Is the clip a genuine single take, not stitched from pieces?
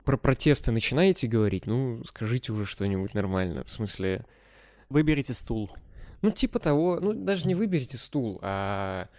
yes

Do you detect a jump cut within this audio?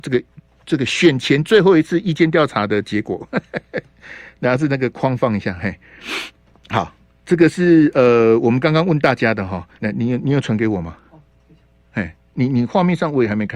yes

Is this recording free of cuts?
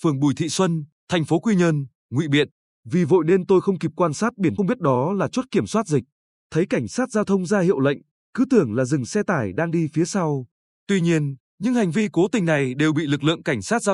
no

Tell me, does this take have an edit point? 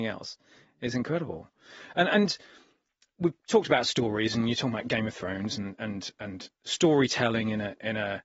no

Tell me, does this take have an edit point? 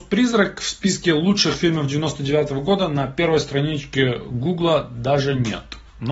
no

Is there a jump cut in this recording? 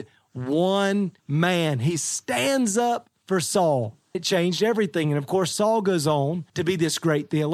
yes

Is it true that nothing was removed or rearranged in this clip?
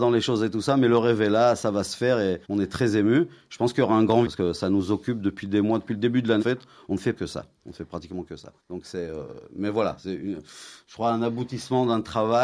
no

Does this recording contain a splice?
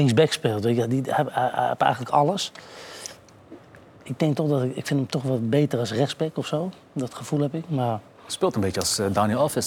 no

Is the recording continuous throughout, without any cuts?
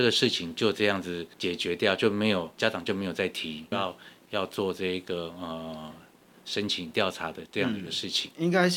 no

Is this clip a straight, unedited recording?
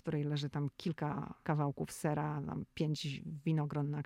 no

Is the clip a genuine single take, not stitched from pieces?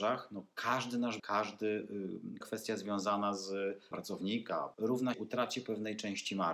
no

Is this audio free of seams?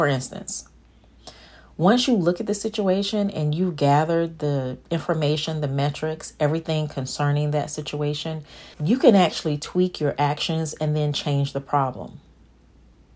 no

